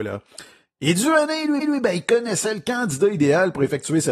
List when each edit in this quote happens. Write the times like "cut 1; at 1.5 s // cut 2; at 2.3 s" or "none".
cut 1; at 1.6 s